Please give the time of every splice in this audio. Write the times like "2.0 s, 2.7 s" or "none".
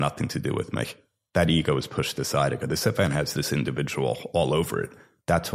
none